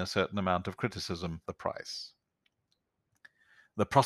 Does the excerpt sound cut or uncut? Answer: cut